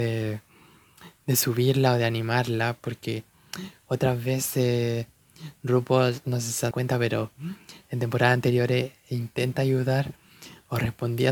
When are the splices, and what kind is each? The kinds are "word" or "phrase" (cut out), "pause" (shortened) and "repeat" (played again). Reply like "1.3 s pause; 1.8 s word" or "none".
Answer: 6.7 s word